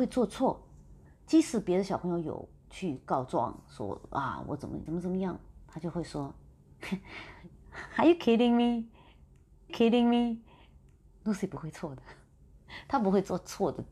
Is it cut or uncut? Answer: cut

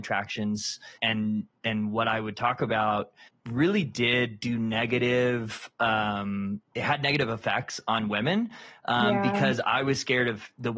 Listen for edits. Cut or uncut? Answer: cut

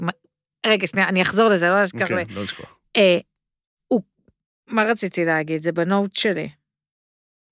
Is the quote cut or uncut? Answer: uncut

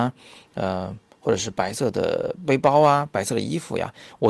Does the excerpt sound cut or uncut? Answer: uncut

